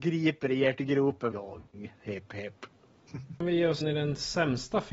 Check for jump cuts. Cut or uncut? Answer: cut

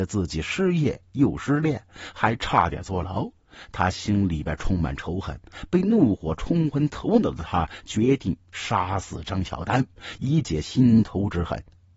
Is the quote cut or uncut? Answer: uncut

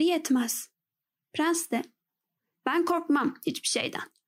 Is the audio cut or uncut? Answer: uncut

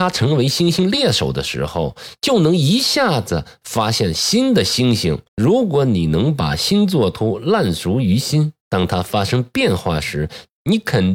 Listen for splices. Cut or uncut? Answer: cut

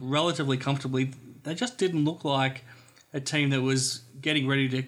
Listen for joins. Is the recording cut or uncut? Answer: uncut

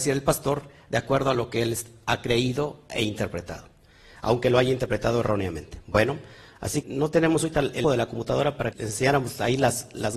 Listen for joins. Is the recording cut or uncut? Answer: cut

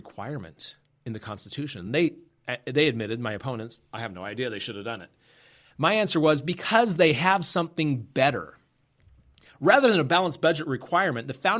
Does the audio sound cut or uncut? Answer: uncut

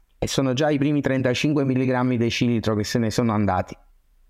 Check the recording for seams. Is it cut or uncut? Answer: uncut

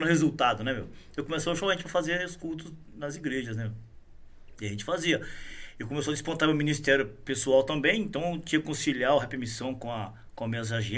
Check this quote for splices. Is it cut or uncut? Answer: uncut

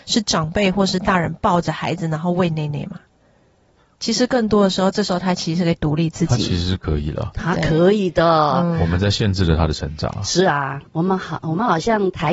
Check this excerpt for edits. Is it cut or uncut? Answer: cut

